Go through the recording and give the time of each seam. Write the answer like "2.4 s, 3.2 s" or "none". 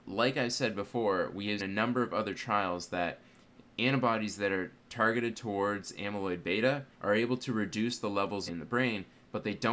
1.6 s, 6.9 s, 8.5 s

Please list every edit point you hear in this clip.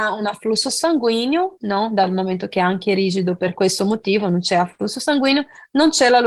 none

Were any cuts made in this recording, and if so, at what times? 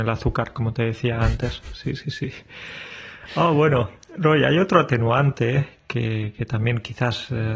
none

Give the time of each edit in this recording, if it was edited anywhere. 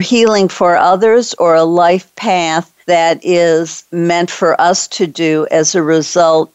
2.8 s

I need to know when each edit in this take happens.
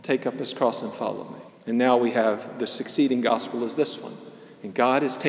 1.5 s

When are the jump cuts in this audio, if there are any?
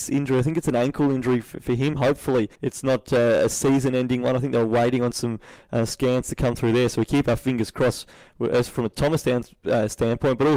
2.5 s

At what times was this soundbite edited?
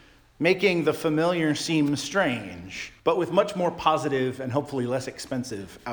3.0 s

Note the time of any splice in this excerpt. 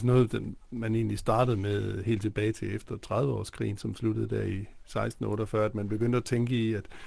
none

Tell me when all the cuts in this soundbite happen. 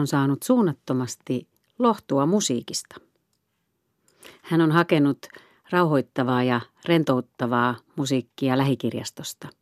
none

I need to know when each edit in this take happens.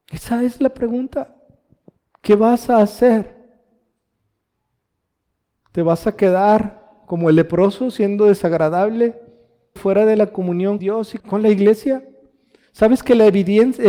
9.8 s, 10.8 s, 11.2 s

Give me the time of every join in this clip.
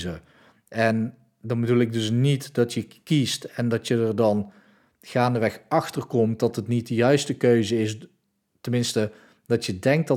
none

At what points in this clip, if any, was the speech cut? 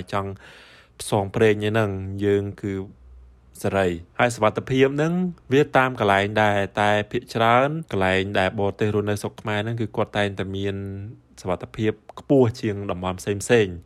4.1 s, 5.4 s, 7.9 s

